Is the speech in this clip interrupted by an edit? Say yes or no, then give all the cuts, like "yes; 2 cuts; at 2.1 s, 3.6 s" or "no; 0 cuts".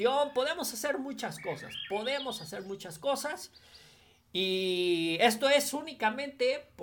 no; 0 cuts